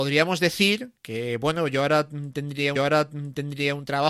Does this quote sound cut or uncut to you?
cut